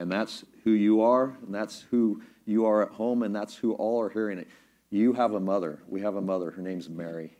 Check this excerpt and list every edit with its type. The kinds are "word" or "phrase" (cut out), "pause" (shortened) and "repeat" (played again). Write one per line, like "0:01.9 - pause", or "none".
none